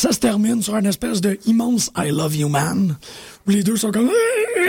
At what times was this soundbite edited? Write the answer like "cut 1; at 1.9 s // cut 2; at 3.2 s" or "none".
none